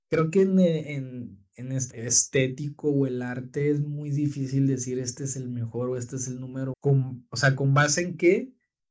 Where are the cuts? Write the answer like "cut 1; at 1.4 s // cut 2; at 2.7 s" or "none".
cut 1; at 1.9 s // cut 2; at 6.7 s